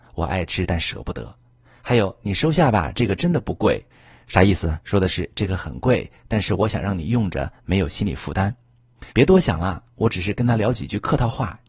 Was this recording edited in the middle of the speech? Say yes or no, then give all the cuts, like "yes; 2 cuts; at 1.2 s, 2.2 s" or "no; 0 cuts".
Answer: yes; 2 cuts; at 3.9 s, 9.1 s